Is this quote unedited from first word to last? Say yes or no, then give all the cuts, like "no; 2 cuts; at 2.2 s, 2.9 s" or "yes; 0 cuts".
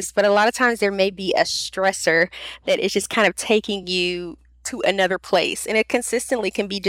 yes; 0 cuts